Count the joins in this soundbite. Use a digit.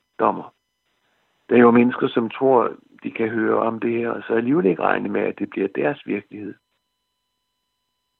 1